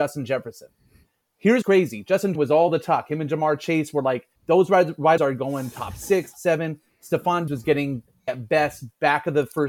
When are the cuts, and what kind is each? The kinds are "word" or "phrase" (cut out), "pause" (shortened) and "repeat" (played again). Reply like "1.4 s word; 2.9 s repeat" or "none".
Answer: 1.6 s word; 2.3 s word; 4.3 s pause; 5.2 s word; 6.3 s word; 7.5 s word; 8.3 s word